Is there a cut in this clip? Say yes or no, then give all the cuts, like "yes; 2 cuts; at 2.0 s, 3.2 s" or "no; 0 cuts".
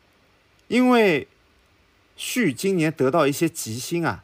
no; 0 cuts